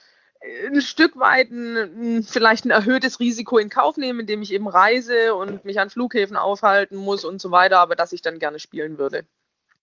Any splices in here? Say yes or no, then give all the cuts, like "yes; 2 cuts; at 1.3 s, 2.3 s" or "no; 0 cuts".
no; 0 cuts